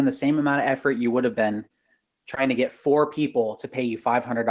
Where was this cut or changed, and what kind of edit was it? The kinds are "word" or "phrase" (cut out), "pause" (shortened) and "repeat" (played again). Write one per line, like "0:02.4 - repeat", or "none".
none